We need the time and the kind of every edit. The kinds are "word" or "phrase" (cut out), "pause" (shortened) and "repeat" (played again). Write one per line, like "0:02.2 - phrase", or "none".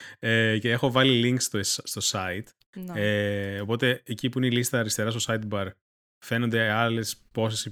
none